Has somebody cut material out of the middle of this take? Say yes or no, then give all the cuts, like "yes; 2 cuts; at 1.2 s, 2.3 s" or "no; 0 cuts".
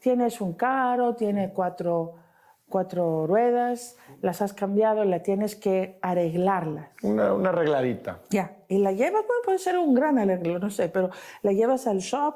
no; 0 cuts